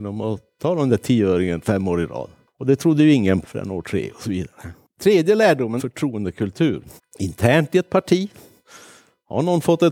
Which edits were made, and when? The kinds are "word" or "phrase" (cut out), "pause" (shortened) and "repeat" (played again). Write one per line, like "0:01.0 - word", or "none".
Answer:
0:03.4 - word
0:03.8 - phrase
0:05.8 - phrase
0:07.0 - pause

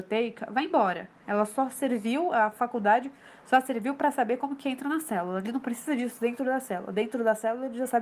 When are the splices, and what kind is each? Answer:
0:01.2 - pause

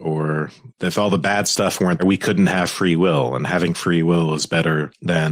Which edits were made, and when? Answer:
0:02.0 - word

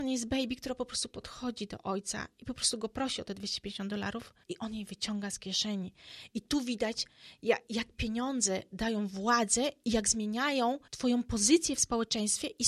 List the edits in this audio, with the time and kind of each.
0:04.4 - pause
0:10.9 - pause

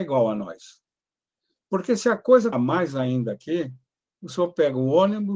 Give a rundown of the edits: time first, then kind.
0:02.5 - word
0:04.0 - pause

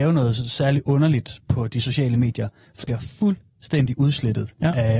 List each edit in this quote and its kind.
0:02.8 - word

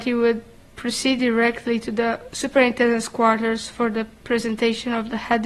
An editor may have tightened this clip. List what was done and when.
none

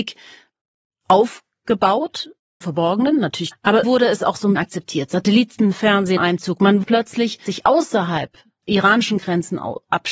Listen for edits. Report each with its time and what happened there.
0:02.6 - word
0:03.5 - word
0:03.8 - word
0:04.5 - word
0:06.2 - word
0:06.8 - word
0:07.5 - word
0:08.6 - word

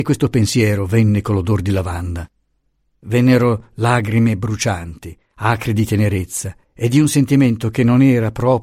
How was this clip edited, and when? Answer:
none

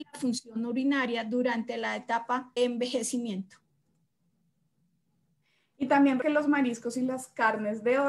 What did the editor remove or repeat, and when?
0:02.6 - word
0:06.2 - word

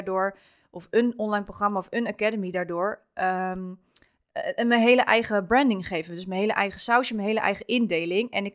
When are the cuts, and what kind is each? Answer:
none

